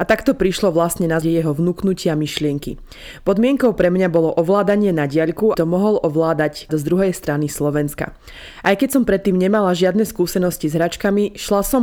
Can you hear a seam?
yes; 3 cuts; at 1.2 s, 5.5 s, 6.7 s

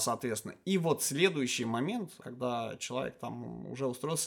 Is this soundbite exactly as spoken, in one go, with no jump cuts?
yes; 0 cuts

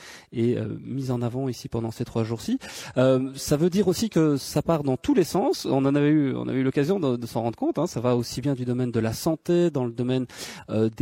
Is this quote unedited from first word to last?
yes; 0 cuts

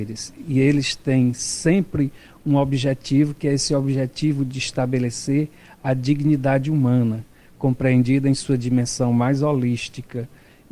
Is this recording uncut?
yes; 0 cuts

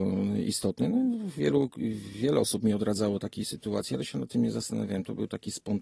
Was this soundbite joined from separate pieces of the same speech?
no; 0 cuts

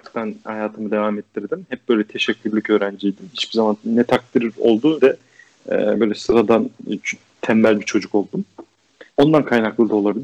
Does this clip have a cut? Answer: yes; 2 cuts; at 5.0 s, 9.1 s

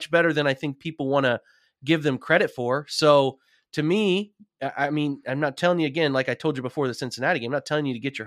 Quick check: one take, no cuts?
yes; 0 cuts

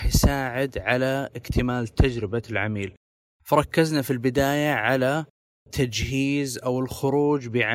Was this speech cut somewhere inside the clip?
no; 0 cuts

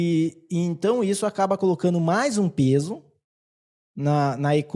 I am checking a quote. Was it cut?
no; 0 cuts

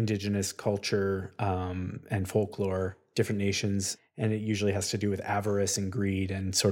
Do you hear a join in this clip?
no; 0 cuts

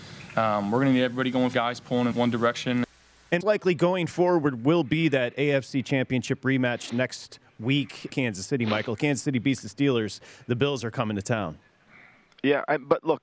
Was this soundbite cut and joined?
yes; 4 cuts; at 1.5 s, 2.1 s, 3.4 s, 8.1 s

